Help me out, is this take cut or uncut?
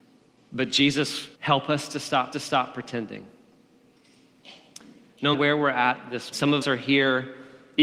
cut